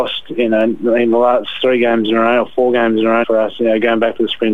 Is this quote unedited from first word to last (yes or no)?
no